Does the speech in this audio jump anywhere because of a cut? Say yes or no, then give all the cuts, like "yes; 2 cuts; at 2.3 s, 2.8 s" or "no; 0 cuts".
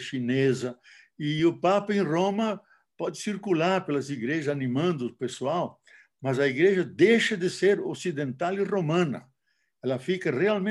no; 0 cuts